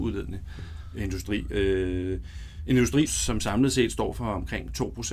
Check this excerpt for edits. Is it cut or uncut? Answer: cut